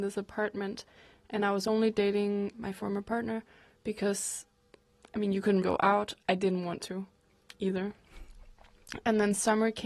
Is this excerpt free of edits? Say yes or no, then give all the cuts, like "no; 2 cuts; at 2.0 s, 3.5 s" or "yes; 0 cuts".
no; 2 cuts; at 2.5 s, 5.6 s